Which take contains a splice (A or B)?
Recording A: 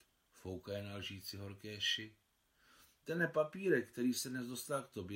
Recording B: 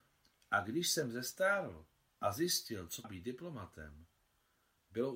B